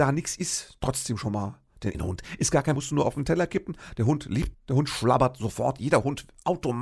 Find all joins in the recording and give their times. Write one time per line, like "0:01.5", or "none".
0:01.9
0:02.8
0:04.5